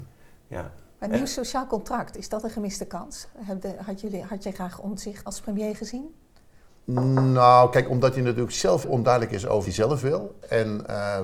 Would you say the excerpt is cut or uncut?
cut